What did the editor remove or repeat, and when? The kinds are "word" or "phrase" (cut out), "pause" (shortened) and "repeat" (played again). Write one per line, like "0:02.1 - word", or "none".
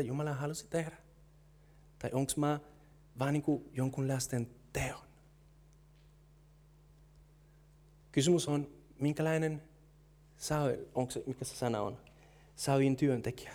none